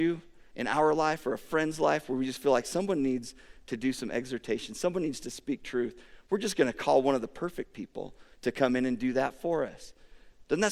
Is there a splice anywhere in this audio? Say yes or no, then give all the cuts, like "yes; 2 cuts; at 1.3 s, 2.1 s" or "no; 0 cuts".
no; 0 cuts